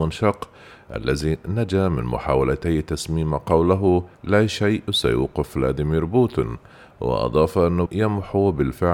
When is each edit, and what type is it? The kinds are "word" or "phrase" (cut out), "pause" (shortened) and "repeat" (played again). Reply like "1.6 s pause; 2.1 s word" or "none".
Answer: 4.1 s pause; 7.9 s word